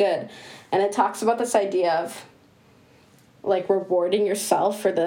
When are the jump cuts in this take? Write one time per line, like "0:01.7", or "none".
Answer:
none